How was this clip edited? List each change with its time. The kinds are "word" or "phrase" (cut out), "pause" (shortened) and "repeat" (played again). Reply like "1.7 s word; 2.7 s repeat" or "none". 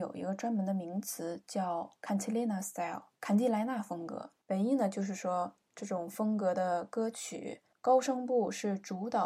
3.2 s pause; 4.4 s pause; 7.7 s pause